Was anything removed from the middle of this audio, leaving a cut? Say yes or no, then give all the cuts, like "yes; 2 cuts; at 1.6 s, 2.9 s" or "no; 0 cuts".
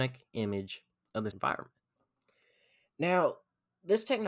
yes; 1 cut; at 1.3 s